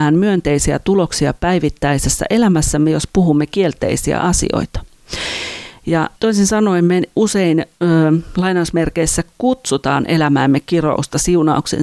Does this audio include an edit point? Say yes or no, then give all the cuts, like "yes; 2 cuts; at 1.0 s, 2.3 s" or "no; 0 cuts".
yes; 2 cuts; at 6.2 s, 7.7 s